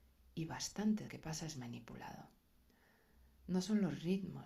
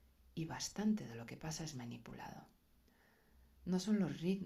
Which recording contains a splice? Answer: first; 1 cut; at 1.1 s

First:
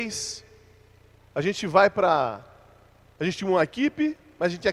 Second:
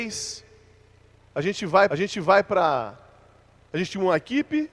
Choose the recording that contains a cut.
second; 1 cut; at 1.9 s

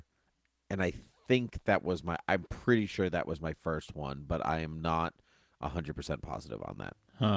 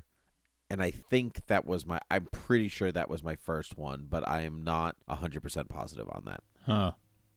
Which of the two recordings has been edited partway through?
second; 2 cuts; at 1.0 s, 5.0 s

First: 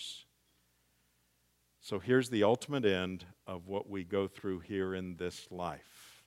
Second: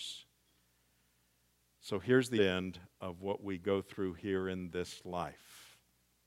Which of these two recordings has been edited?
second; 1 cut; at 2.4 s

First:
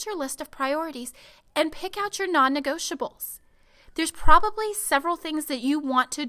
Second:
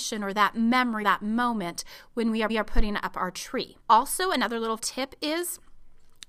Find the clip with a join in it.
second; 4 cuts; at 1.0 s, 2.5 s, 3.8 s, 4.8 s

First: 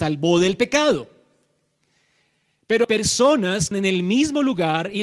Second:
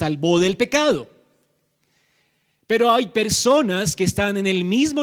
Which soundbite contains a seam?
first; 2 cuts; at 2.8 s, 3.7 s

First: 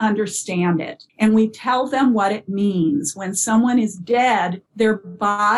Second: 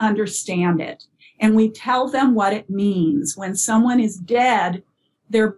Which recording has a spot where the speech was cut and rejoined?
first; 2 cuts; at 1.1 s, 4.7 s

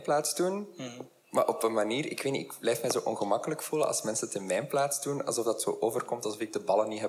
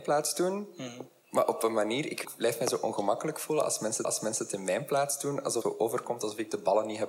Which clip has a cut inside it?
second; 3 cuts; at 2.2 s, 4.0 s, 5.6 s

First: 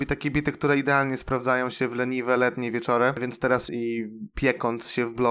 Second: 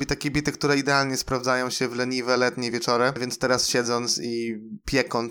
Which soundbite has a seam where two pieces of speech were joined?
first; 1 cut; at 3.7 s

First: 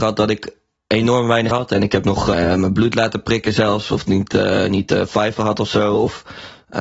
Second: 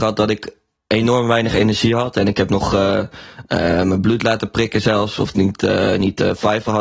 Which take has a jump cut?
first; 2 cuts; at 1.5 s, 2.3 s

